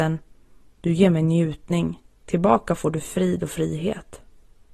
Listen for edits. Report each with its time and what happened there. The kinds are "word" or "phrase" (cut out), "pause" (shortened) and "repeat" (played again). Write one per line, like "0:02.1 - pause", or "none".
none